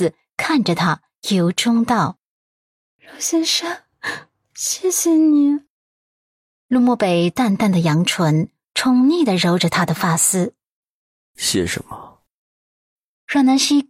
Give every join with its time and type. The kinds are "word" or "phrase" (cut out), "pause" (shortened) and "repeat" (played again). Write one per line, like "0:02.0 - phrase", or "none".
none